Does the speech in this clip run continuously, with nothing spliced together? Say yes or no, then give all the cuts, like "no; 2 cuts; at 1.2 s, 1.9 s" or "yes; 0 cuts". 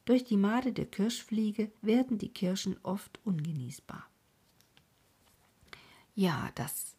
no; 1 cut; at 1.8 s